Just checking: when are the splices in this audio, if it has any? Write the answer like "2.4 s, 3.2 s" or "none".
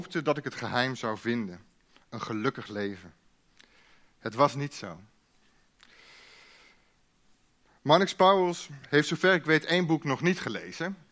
none